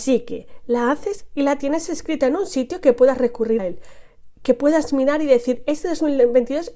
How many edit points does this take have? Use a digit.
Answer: 1